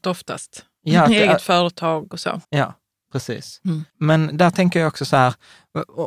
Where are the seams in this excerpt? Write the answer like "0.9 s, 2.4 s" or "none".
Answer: 2.4 s, 3.9 s